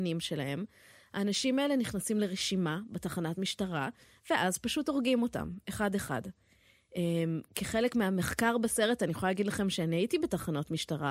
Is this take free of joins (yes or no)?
yes